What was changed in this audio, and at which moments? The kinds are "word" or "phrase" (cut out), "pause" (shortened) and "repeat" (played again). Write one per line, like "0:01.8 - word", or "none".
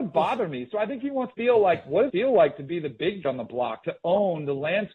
0:01.3 - word
0:02.1 - word
0:03.2 - word
0:03.8 - word